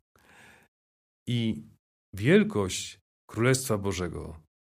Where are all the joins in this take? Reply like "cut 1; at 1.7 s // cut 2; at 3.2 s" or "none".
none